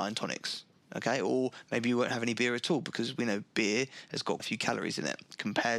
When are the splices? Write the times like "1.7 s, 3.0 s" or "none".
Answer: 4.4 s

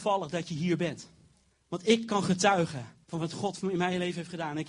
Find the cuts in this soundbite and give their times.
1.5 s, 3.0 s

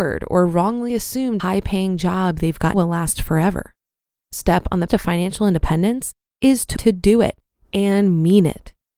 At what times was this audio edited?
1.4 s, 2.7 s, 4.3 s, 4.9 s, 6.8 s

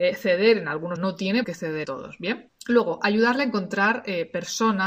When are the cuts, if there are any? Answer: 1.0 s, 1.4 s, 1.8 s

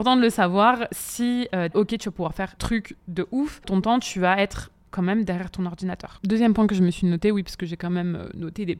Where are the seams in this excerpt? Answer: 1.7 s, 2.6 s, 3.6 s

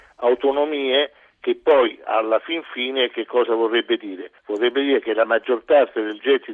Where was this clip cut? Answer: 4.4 s

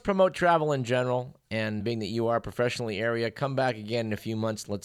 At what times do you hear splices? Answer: 1.8 s

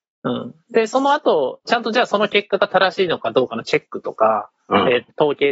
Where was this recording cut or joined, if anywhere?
1.7 s

